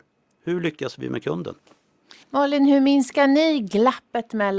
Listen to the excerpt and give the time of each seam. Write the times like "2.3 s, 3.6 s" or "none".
2.2 s